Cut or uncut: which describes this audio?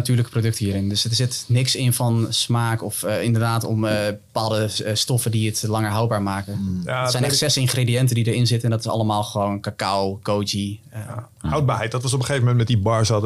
uncut